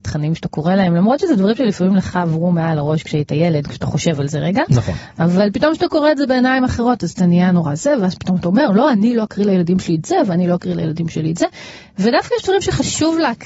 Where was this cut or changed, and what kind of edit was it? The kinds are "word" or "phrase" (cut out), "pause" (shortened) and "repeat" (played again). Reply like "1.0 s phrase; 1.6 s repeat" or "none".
none